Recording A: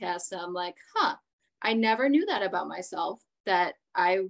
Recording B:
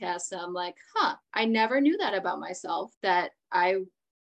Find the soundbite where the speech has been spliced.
B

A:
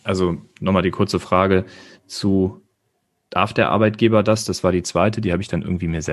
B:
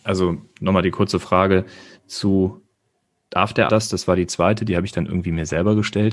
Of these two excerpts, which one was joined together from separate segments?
B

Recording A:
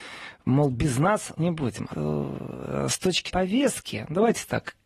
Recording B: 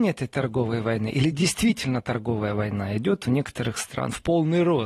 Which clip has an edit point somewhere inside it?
A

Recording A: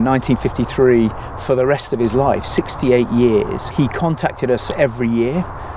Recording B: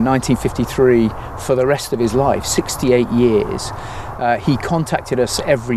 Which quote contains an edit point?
A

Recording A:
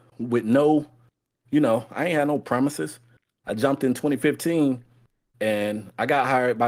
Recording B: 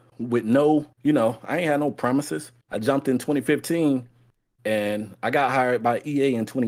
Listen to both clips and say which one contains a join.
B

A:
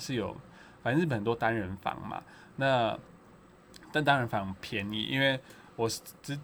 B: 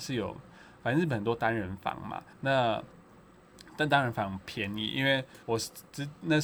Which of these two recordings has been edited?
B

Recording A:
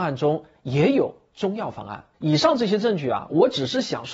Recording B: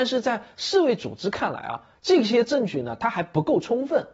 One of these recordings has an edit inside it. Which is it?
A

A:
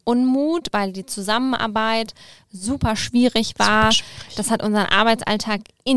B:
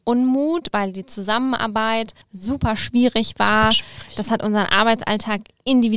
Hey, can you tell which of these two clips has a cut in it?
B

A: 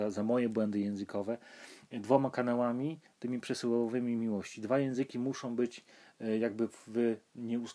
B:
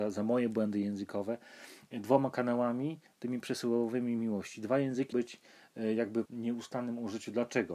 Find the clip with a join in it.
B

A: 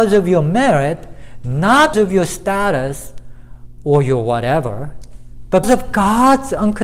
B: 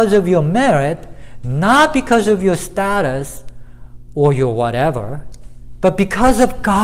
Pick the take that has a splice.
A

